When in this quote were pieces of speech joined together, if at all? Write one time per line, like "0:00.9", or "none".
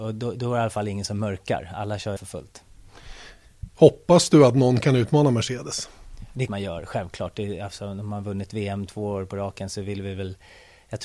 0:02.2
0:06.5